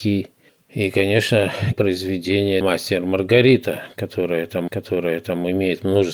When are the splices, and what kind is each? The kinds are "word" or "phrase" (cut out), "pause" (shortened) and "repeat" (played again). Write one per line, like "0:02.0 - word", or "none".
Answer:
0:01.7 - word
0:02.6 - word
0:04.7 - repeat